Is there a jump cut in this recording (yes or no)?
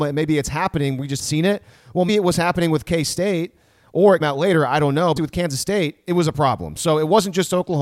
yes